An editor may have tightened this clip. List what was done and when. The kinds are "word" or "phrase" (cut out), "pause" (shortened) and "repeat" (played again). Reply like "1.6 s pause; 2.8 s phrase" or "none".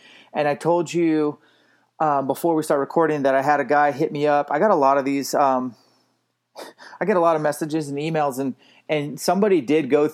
none